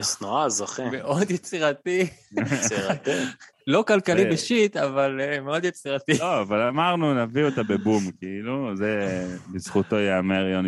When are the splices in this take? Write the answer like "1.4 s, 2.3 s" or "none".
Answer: none